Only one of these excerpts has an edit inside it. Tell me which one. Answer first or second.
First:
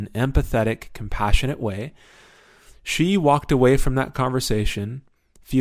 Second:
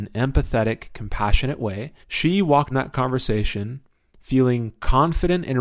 second